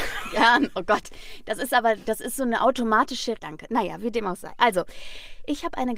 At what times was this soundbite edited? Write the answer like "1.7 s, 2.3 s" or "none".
3.4 s